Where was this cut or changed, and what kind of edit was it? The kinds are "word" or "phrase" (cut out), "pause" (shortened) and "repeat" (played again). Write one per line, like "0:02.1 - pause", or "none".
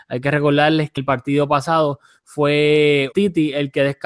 0:01.0 - word
0:03.1 - word